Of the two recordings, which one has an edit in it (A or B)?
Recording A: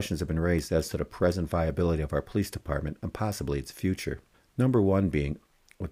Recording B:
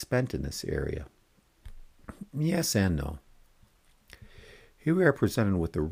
A